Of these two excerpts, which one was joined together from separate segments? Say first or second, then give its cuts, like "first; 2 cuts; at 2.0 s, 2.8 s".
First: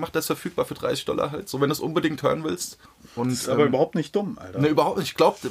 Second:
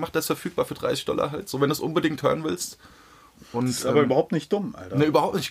first; 1 cut; at 2.9 s